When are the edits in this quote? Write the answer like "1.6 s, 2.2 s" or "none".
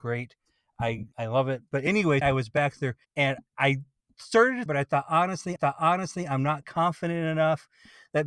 1.1 s, 2.2 s, 3.0 s, 4.7 s, 5.6 s